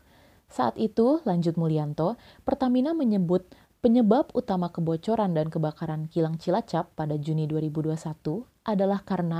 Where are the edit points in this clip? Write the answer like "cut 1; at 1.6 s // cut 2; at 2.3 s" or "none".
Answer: none